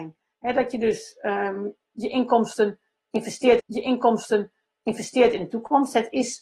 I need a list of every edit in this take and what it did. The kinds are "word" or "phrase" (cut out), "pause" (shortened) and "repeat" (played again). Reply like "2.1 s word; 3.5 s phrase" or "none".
3.6 s repeat